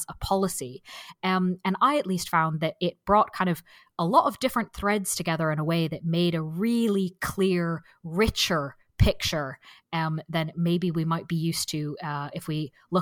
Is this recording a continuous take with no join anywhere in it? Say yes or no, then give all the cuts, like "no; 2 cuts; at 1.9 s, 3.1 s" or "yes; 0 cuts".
yes; 0 cuts